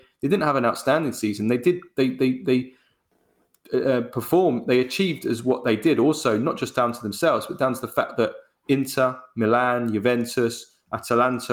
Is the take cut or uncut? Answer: uncut